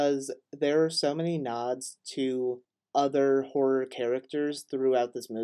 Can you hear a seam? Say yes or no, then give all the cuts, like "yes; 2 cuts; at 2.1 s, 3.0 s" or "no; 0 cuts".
no; 0 cuts